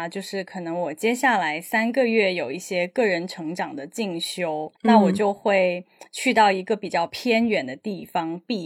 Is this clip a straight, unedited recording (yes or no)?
no